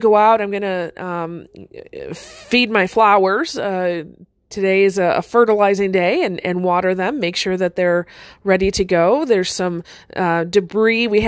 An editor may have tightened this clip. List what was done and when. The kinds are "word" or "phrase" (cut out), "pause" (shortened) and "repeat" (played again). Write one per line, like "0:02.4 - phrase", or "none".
none